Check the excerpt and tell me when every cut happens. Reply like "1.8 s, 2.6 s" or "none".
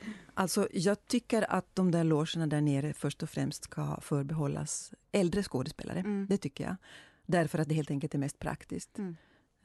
1.0 s